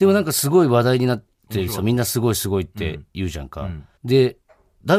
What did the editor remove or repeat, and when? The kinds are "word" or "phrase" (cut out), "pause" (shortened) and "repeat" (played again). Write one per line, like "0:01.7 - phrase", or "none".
0:04.0 - pause